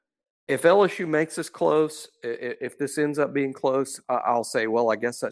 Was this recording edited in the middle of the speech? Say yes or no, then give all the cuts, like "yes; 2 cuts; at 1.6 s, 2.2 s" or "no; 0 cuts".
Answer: no; 0 cuts